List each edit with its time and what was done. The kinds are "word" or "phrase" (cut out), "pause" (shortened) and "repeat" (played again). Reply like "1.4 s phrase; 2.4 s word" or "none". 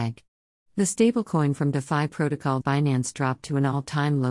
2.6 s word

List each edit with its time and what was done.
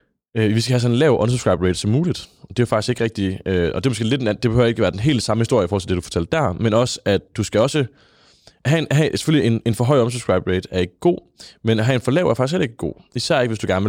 none

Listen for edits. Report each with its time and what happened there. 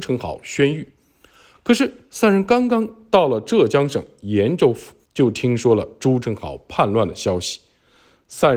5.0 s pause

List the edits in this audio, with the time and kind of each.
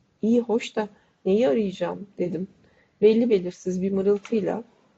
none

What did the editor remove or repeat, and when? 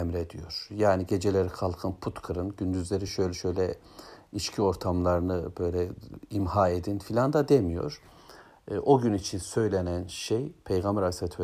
none

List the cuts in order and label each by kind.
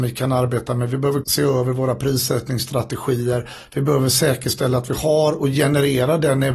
1.2 s word

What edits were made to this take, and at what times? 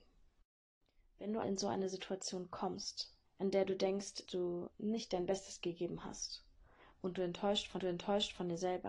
1.4 s word; 3.3 s pause; 4.3 s word; 7.8 s repeat

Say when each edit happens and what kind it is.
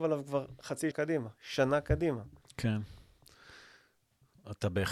0.9 s word; 2.4 s pause

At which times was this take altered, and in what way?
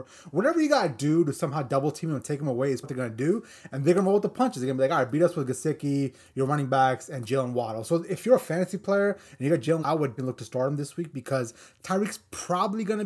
2.8 s word; 9.8 s word; 10.2 s word

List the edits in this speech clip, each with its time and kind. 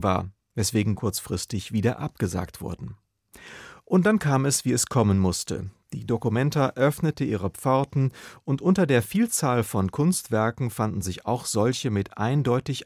1.0 s phrase

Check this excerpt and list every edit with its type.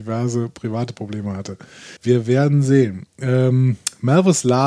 2.0 s pause

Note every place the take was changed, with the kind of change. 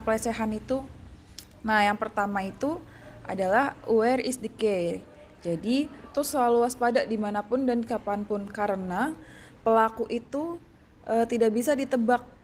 6.1 s phrase; 9.6 s pause

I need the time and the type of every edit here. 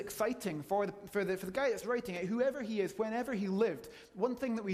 none

